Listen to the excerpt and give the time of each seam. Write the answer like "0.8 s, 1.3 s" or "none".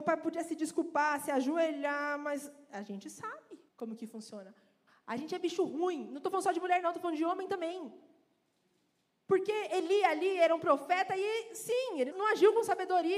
3.7 s, 12.1 s